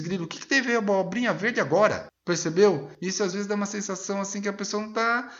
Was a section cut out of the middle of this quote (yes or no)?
no